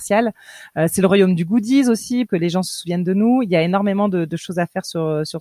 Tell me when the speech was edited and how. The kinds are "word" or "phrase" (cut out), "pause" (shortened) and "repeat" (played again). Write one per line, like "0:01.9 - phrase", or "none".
0:02.3 - word